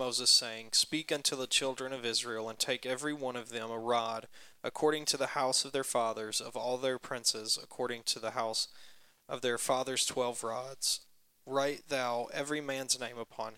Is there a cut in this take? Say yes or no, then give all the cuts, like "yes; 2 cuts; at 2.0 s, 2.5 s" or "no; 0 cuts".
no; 0 cuts